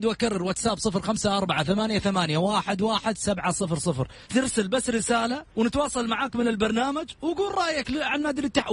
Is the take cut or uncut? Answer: cut